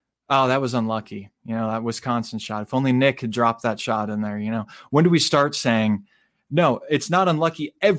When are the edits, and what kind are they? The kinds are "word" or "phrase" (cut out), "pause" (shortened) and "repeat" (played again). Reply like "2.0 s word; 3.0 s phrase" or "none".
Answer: none